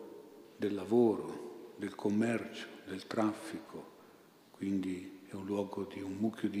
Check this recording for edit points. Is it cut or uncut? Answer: uncut